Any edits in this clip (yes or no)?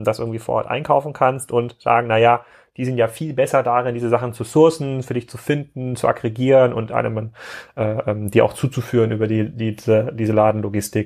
no